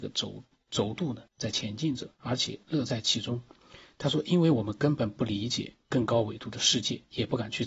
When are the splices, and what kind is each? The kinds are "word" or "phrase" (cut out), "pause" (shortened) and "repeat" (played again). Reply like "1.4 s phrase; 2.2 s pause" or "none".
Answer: 1.3 s pause; 2.1 s pause